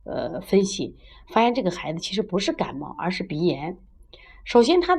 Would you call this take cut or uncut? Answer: uncut